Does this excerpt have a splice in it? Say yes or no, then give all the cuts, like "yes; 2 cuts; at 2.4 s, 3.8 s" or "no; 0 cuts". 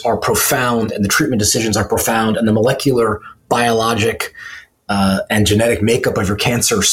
no; 0 cuts